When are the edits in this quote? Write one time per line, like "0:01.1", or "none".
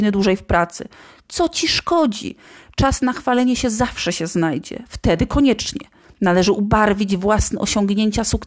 none